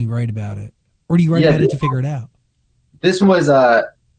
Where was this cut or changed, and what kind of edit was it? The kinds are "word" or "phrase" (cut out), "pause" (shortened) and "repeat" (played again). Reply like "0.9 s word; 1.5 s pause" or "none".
3.2 s word